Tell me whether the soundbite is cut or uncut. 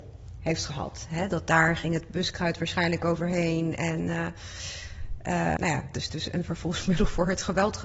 cut